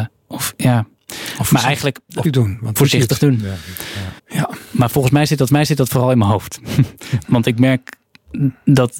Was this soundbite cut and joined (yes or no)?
yes